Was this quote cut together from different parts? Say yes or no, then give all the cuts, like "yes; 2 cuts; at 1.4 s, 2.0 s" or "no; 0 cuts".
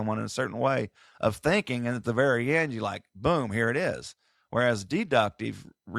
no; 0 cuts